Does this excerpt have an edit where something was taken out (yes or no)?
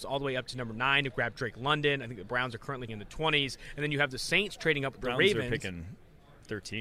yes